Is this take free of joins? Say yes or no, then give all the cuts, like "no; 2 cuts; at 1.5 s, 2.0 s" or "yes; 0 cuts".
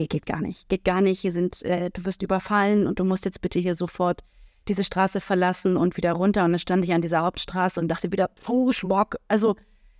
yes; 0 cuts